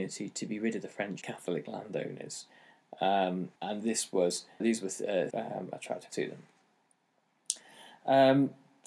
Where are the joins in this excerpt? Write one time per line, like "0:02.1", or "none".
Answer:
0:01.2
0:03.6
0:04.6
0:05.3
0:06.1